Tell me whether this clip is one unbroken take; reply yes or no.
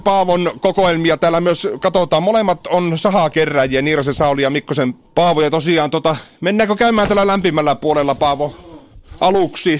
yes